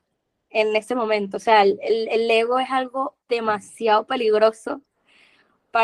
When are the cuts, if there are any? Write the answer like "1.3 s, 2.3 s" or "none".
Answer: 3.2 s